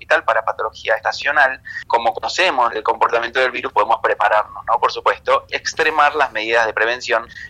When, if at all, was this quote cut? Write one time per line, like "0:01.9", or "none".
0:05.5

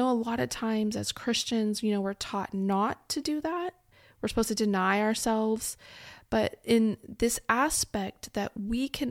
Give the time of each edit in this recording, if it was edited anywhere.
none

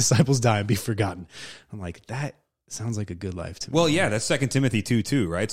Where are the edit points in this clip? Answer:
none

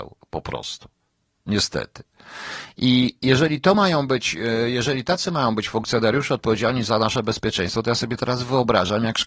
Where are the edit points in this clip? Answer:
none

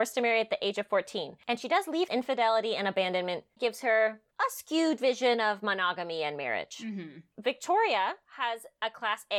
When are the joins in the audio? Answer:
0:02.1
0:03.6

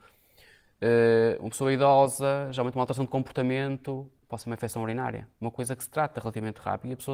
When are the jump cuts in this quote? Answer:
none

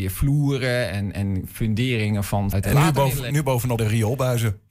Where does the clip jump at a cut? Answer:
0:01.1
0:02.5
0:03.3
0:03.8

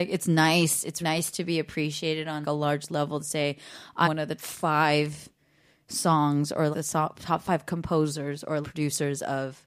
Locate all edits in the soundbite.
0:01.0
0:02.4
0:04.0
0:04.4
0:06.7
0:08.6

